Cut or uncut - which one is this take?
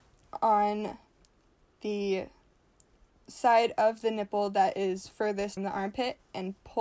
cut